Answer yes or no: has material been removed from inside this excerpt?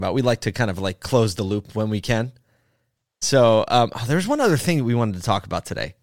no